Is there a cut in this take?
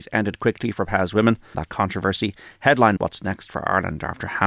yes; 2 cuts; at 1.5 s, 3.0 s

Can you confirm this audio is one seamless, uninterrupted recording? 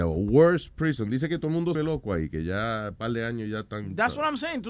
no; 1 cut; at 1.7 s

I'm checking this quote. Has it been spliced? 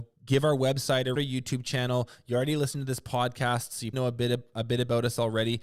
yes; 2 cuts; at 1.2 s, 3.9 s

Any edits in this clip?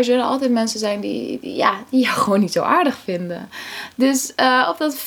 no; 0 cuts

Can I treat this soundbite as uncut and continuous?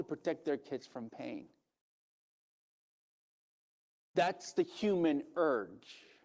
yes; 0 cuts

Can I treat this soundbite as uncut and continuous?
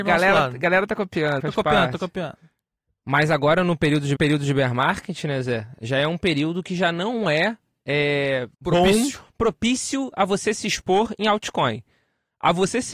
no; 3 cuts; at 1.4 s, 4.2 s, 8.5 s

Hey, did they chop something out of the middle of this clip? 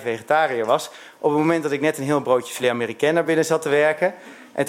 no; 0 cuts

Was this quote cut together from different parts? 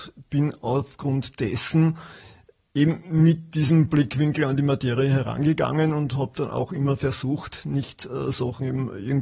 no; 0 cuts

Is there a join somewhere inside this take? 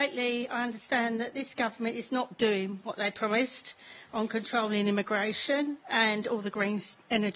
no; 0 cuts

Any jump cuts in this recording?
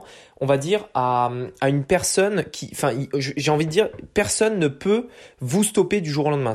no; 0 cuts

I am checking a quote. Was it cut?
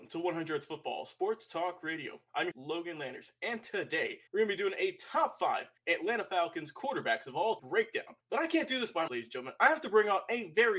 yes; 6 cuts; at 2.5 s, 4.3 s, 5.8 s, 7.6 s, 8.2 s, 9.1 s

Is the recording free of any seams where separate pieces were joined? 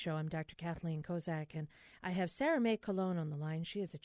yes; 0 cuts

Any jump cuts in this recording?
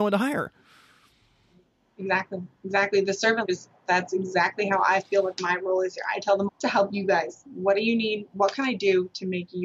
yes; 2 cuts; at 3.4 s, 6.5 s

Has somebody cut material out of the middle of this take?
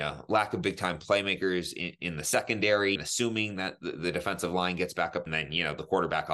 yes; 2 cuts; at 3.0 s, 5.3 s

